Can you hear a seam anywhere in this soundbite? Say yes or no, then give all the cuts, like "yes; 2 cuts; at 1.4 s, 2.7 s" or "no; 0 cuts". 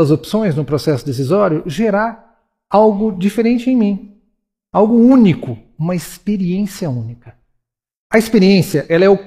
no; 0 cuts